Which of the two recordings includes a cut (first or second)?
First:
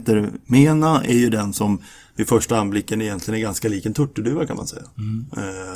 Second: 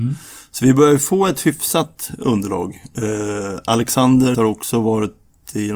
second